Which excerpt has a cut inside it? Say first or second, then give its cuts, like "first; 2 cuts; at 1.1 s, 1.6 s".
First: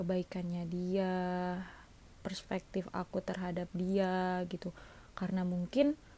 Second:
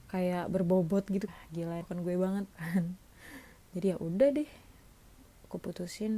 second; 3 cuts; at 1.3 s, 1.8 s, 2.5 s